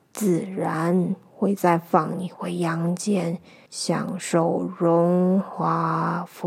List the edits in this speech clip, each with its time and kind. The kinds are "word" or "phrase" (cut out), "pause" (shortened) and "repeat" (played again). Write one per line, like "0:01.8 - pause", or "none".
0:03.7 - pause